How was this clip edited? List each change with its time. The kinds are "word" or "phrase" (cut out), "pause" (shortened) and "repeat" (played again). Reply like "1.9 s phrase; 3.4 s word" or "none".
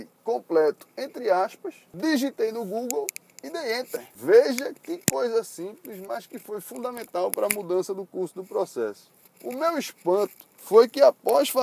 none